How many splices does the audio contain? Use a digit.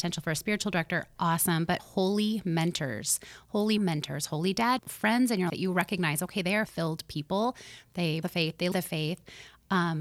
7